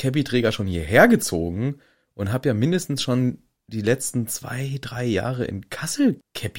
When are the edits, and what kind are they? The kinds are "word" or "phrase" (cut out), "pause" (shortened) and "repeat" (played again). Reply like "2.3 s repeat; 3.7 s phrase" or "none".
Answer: none